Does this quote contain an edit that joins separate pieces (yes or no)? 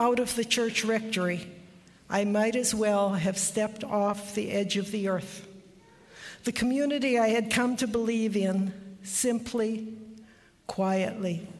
no